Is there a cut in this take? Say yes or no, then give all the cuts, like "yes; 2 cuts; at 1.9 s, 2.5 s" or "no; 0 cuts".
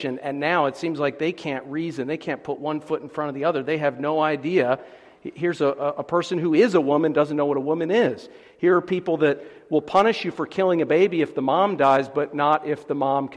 no; 0 cuts